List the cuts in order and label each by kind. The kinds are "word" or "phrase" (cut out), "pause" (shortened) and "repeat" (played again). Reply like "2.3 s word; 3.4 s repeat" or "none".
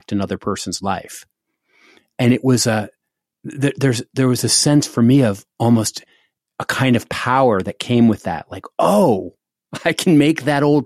none